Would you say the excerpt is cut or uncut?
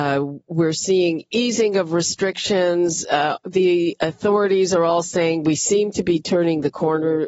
uncut